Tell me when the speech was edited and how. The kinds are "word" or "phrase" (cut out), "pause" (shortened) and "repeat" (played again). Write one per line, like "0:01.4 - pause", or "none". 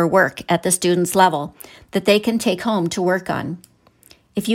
none